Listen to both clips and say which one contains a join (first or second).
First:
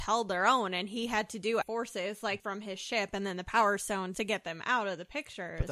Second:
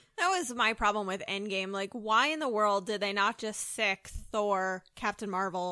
first